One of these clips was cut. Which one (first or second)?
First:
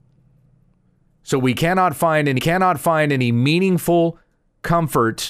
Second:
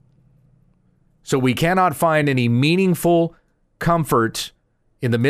first